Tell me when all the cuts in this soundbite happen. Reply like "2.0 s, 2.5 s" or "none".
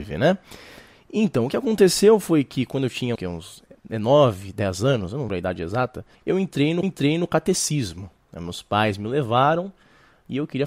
3.2 s, 5.3 s, 6.1 s, 6.8 s